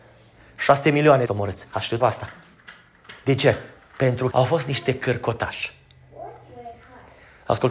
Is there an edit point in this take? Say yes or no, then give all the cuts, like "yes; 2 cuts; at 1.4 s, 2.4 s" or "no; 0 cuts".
yes; 3 cuts; at 1.2 s, 2.0 s, 4.3 s